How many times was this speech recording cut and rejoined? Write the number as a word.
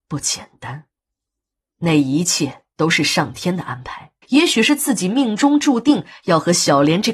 one